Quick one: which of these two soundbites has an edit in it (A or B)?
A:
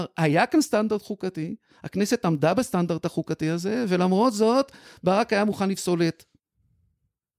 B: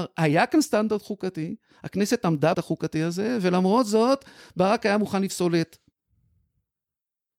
B